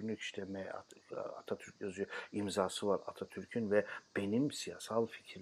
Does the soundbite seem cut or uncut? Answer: uncut